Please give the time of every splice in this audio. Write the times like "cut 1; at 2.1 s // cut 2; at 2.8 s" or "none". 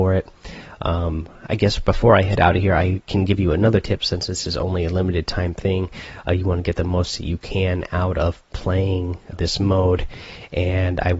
cut 1; at 9.3 s